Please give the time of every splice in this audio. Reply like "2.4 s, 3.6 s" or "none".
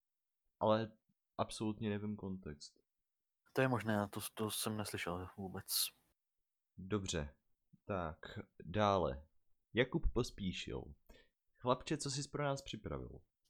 none

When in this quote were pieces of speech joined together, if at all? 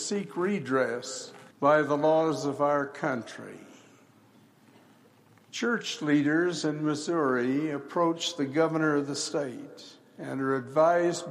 1.5 s

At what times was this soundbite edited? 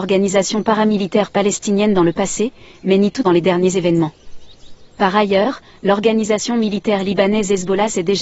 3.2 s

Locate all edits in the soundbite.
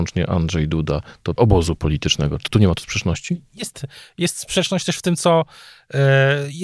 1.4 s, 2.5 s

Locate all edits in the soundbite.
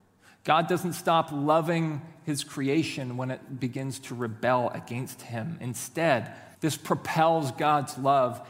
6.5 s

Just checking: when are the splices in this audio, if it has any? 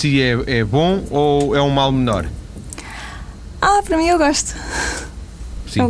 none

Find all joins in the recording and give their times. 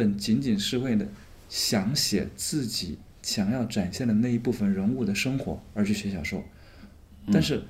1.4 s, 3.1 s

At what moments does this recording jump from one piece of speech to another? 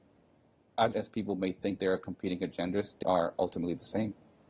0.9 s, 1.8 s, 3.0 s

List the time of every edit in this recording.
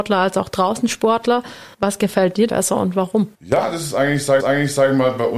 1.7 s, 2.5 s, 3.3 s, 4.4 s

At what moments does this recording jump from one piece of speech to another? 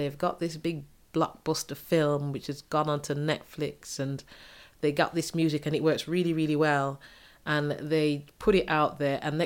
none

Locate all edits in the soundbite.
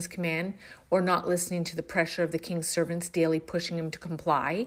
none

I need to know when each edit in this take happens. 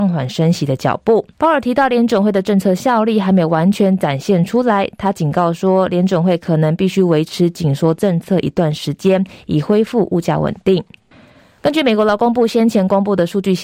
1.3 s, 11.1 s

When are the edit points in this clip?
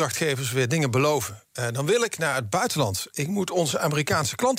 none

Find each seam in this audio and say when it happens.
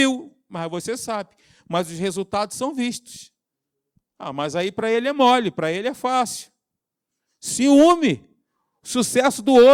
none

